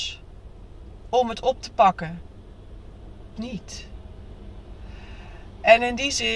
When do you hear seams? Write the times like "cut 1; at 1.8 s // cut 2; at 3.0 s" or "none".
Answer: cut 1; at 3.4 s

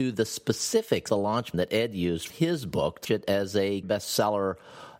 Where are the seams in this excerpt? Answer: cut 1; at 1.1 s // cut 2; at 1.5 s // cut 3; at 2.3 s // cut 4; at 3.0 s // cut 5; at 3.8 s

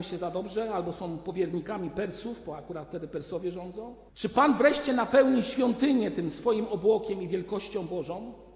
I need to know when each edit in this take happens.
cut 1; at 4.1 s

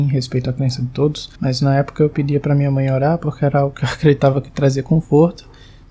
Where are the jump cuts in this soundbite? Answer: cut 1; at 1.3 s

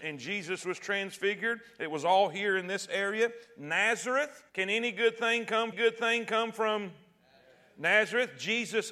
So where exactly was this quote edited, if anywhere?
cut 1; at 4.5 s // cut 2; at 5.7 s

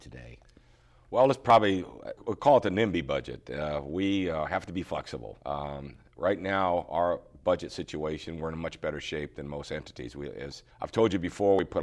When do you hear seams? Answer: cut 1; at 2.2 s // cut 2; at 5.4 s // cut 3; at 10.7 s

